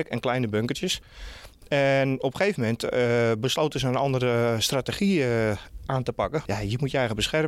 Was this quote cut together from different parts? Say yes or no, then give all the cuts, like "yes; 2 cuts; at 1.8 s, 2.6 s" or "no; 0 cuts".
no; 0 cuts